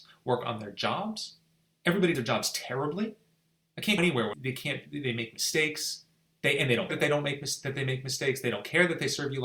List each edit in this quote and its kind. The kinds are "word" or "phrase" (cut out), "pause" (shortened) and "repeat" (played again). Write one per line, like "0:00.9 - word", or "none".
0:02.1 - word
0:04.0 - word
0:04.3 - word
0:06.9 - word